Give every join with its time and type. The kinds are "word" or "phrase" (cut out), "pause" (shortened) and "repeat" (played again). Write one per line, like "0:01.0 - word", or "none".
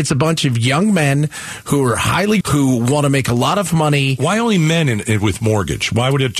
0:02.4 - word